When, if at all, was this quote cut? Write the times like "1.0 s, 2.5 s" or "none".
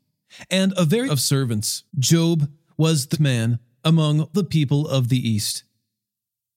1.1 s, 1.9 s, 3.1 s, 4.3 s